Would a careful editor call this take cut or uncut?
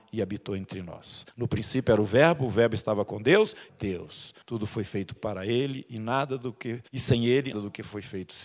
cut